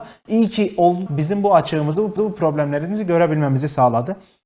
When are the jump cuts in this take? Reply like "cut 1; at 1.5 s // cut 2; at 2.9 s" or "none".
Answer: cut 1; at 1.1 s // cut 2; at 2.2 s